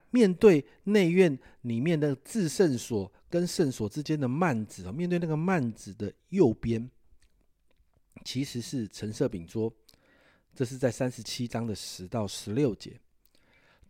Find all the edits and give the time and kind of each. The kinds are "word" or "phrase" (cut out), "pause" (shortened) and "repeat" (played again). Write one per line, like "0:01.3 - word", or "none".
none